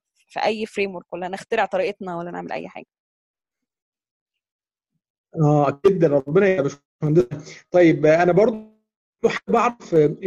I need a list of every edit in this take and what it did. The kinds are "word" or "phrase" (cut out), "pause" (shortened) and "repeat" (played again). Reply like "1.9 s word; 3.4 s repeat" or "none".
none